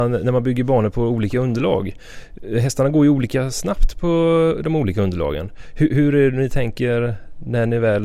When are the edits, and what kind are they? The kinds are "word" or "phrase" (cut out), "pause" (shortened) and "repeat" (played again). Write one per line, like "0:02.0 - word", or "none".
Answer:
none